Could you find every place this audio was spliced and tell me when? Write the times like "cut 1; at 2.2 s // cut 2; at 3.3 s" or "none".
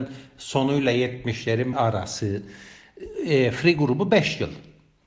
cut 1; at 1.7 s